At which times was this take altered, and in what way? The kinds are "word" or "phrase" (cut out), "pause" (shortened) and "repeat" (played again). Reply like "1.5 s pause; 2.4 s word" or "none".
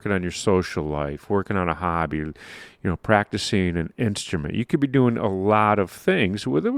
none